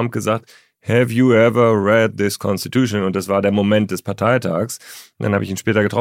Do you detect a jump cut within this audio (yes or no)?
no